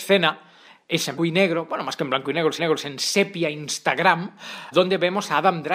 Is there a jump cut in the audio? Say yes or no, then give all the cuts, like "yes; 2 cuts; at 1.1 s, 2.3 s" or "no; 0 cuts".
yes; 3 cuts; at 1.2 s, 2.6 s, 4.7 s